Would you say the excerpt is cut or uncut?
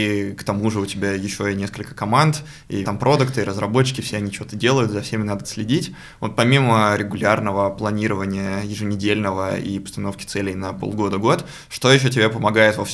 cut